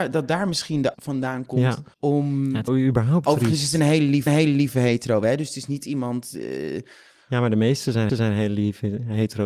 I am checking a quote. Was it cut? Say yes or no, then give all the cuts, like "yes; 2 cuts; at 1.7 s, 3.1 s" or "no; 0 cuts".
yes; 5 cuts; at 0.9 s, 1.9 s, 2.7 s, 4.3 s, 8.1 s